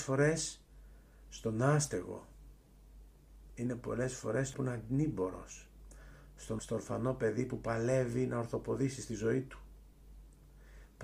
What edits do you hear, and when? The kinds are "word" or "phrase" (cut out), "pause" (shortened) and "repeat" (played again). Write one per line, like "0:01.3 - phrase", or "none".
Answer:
0:04.5 - phrase
0:06.6 - word